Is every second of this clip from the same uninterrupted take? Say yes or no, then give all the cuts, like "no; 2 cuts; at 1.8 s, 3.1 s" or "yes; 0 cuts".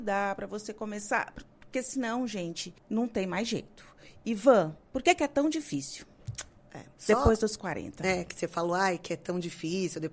no; 3 cuts; at 2.8 s, 4.8 s, 6.9 s